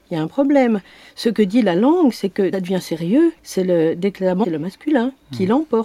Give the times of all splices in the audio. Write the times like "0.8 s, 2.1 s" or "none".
2.5 s, 3.4 s, 4.4 s